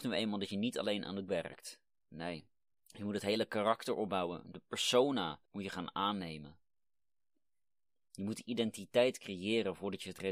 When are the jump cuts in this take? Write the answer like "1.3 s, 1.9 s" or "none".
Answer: 1.3 s, 2.7 s, 5.5 s